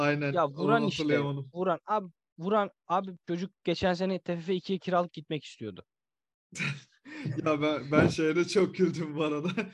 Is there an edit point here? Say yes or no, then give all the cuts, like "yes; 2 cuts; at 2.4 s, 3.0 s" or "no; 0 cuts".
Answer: no; 0 cuts